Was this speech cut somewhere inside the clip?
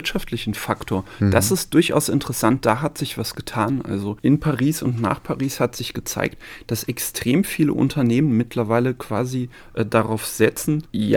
no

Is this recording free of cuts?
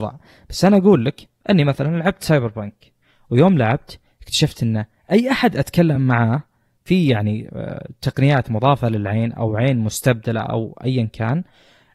yes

